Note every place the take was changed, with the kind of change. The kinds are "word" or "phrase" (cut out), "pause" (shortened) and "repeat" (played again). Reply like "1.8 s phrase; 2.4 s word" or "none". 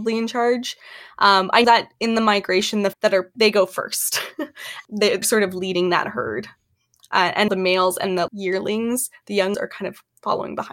1.6 s word; 2.9 s word; 3.3 s word; 5.2 s word; 7.5 s word; 8.3 s word; 9.5 s word

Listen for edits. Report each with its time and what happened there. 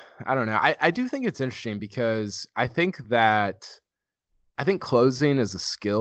none

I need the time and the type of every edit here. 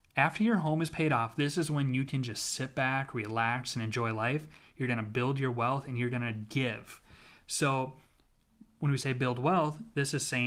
none

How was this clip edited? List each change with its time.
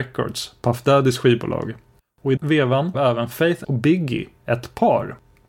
2.4 s word; 2.9 s word; 3.6 s word

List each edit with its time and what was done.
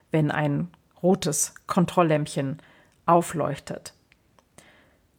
none

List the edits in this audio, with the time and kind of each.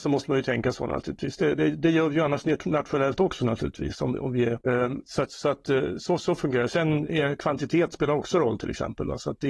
4.6 s pause

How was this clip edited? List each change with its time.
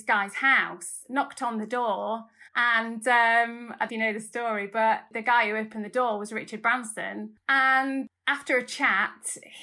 2.5 s pause; 3.9 s phrase

